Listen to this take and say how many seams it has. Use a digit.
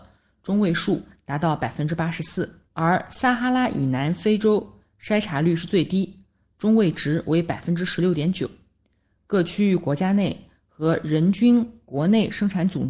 2